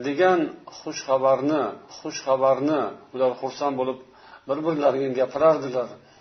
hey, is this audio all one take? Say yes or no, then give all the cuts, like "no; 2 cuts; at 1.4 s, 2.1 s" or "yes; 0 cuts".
no; 1 cut; at 1.9 s